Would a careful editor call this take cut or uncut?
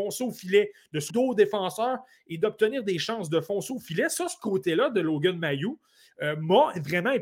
cut